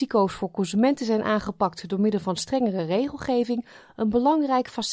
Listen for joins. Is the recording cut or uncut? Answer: uncut